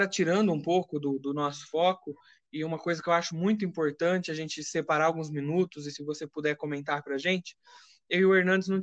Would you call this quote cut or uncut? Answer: uncut